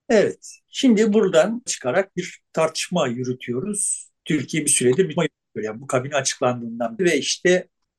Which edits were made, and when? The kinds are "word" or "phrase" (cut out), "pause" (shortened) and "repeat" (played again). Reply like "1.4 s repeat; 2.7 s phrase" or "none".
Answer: 1.7 s word; 4.2 s pause; 5.2 s word; 7.0 s word

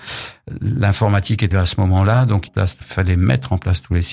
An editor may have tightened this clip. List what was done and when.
1.5 s word; 2.5 s phrase; 2.8 s phrase

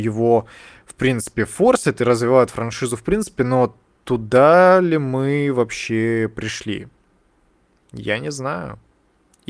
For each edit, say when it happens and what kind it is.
none

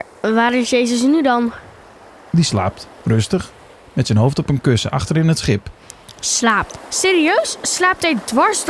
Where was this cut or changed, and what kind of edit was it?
none

